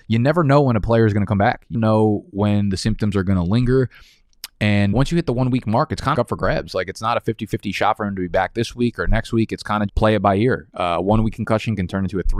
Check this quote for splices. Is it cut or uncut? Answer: cut